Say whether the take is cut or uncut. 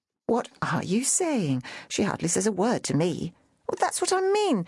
uncut